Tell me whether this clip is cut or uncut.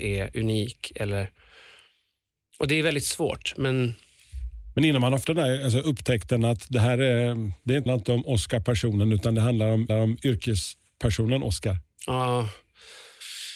cut